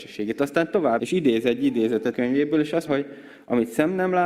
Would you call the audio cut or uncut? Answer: cut